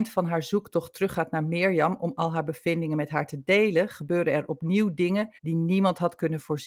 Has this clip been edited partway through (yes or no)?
yes